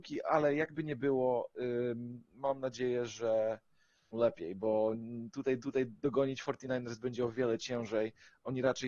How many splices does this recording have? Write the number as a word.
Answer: three